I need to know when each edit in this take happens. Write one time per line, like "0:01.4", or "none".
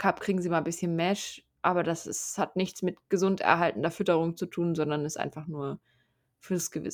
none